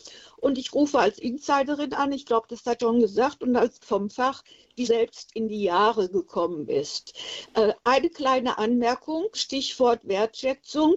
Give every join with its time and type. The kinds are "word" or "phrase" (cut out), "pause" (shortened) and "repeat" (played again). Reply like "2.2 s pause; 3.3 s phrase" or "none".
2.8 s word; 3.8 s word; 4.9 s word; 9.3 s word